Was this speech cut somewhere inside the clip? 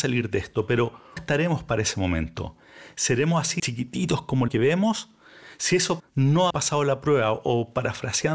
yes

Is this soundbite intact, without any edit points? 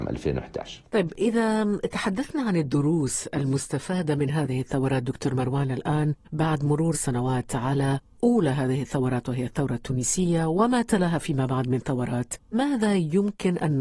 no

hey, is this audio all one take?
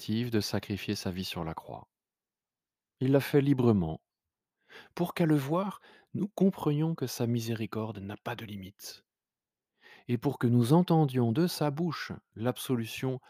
yes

